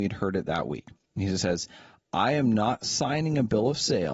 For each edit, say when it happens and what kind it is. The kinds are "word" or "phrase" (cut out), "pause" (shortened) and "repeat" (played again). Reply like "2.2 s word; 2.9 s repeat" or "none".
none